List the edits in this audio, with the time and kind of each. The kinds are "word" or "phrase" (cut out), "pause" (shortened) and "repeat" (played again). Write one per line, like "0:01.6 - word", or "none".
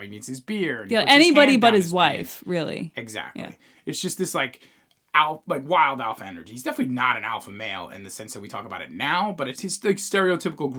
0:09.6 - word